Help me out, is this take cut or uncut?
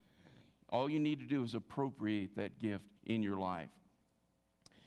cut